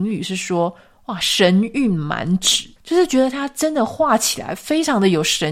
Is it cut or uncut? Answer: cut